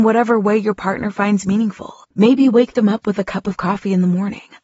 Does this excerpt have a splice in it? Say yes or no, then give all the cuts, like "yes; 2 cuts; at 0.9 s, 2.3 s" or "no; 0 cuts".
yes; 1 cut; at 2.0 s